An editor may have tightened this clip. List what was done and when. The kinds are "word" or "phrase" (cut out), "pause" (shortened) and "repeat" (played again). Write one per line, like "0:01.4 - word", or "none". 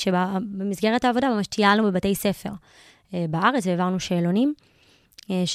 none